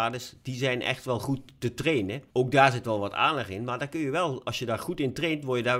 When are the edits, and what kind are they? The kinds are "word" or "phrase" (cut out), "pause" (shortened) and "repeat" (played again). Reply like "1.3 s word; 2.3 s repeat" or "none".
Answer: 2.3 s pause